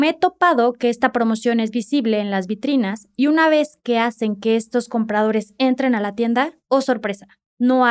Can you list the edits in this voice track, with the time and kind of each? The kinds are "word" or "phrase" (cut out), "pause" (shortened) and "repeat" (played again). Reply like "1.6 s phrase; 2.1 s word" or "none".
6.6 s pause

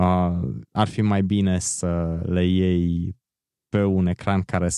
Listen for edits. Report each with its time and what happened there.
none

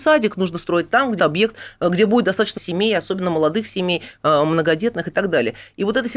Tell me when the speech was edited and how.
1.2 s word; 2.6 s word

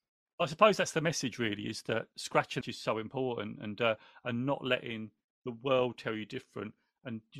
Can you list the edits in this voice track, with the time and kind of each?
2.6 s word

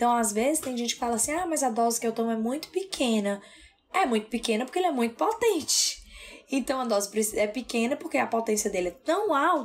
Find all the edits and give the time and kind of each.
none

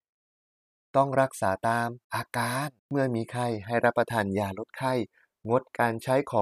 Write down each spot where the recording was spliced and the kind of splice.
2.0 s pause; 2.8 s pause

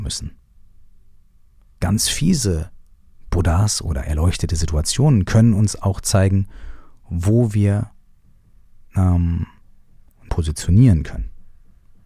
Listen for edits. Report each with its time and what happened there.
8.2 s pause; 10.3 s phrase

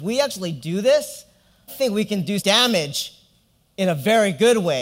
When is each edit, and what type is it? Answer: 1.7 s word; 2.4 s word

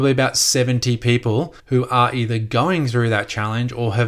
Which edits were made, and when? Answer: 1.6 s pause

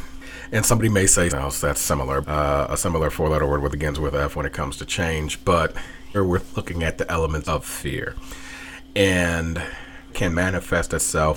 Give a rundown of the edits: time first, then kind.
1.3 s word; 2.2 s word; 3.7 s word; 6.1 s word; 7.4 s word; 10.1 s word

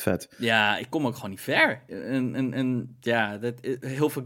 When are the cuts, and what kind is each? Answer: none

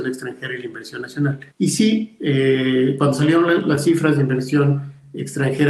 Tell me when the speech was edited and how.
1.5 s pause

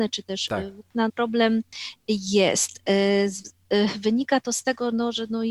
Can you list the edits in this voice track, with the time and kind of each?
1.1 s phrase

